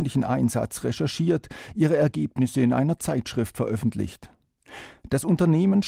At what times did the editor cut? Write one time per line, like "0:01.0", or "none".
none